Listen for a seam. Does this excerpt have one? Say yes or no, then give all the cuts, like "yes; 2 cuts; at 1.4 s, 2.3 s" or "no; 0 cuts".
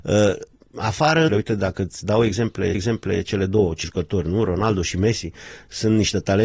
yes; 3 cuts; at 1.3 s, 2.7 s, 3.8 s